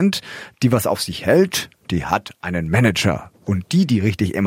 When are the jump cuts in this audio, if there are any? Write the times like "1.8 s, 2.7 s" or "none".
none